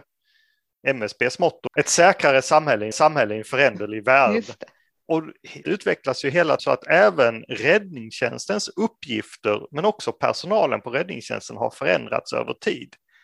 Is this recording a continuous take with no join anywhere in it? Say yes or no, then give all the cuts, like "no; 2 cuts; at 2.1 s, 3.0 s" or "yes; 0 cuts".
no; 4 cuts; at 1.7 s, 2.9 s, 5.6 s, 6.6 s